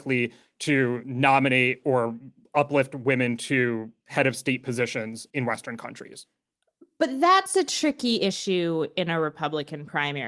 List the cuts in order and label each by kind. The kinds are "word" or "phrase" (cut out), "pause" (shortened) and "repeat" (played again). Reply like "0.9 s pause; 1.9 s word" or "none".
none